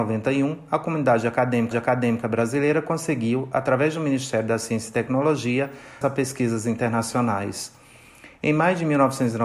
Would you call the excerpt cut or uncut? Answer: cut